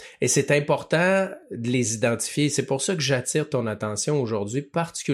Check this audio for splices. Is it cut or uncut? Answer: uncut